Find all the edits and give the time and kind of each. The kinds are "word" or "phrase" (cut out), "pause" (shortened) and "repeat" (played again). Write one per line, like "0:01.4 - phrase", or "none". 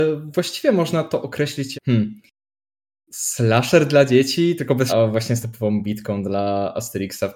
0:01.7 - word
0:04.9 - word
0:05.4 - word